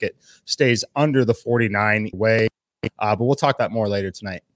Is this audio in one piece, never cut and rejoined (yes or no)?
no